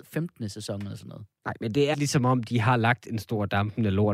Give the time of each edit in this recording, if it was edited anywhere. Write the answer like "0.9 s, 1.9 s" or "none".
1.9 s

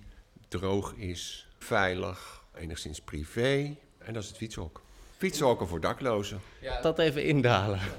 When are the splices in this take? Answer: 1.6 s, 2.5 s, 5.1 s, 6.8 s

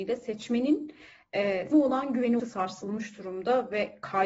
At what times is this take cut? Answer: 1.7 s, 2.4 s

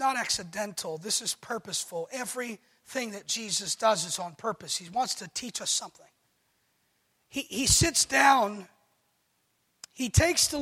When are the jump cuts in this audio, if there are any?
none

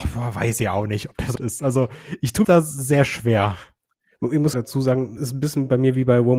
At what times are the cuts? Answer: 1.4 s, 2.4 s, 4.5 s, 5.2 s

